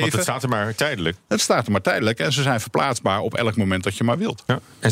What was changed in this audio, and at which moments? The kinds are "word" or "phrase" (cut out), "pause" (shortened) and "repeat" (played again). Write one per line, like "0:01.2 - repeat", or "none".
none